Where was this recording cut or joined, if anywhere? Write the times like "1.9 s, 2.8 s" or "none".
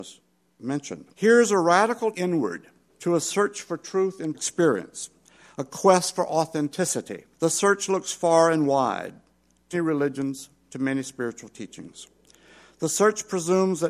1.1 s, 2.1 s, 2.9 s, 4.3 s, 7.3 s, 9.7 s